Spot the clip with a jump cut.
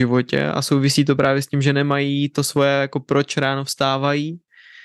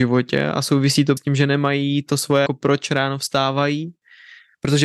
second; 2 cuts; at 1.2 s, 2.5 s

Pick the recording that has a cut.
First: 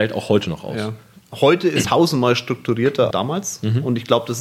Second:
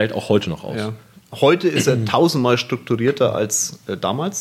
first; 2 cuts; at 1.8 s, 3.1 s

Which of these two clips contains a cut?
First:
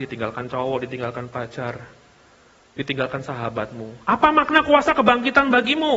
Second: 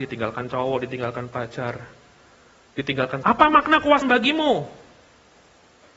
second; 2 cuts; at 3.2 s, 4.0 s

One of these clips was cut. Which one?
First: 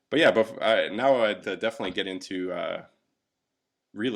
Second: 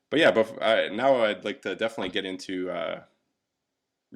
first; 1 cut; at 1.4 s

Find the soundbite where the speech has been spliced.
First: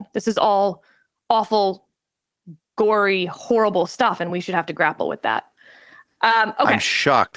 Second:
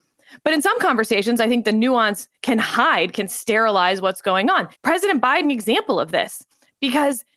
second; 2 cuts; at 4.7 s, 5.4 s

